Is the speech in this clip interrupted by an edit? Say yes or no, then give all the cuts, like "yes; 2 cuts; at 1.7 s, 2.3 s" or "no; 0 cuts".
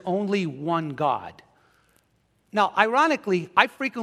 no; 0 cuts